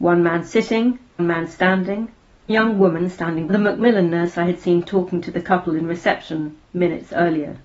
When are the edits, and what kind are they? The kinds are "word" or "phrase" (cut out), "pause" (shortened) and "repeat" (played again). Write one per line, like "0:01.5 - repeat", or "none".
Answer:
0:01.2 - word
0:02.5 - word
0:03.5 - phrase